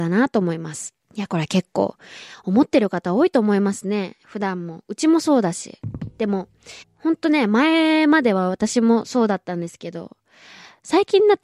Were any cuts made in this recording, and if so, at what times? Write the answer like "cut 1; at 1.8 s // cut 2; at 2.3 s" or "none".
cut 1; at 1.0 s // cut 2; at 6.8 s